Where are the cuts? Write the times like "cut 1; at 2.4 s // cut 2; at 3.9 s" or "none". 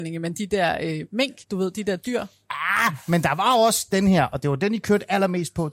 cut 1; at 1.4 s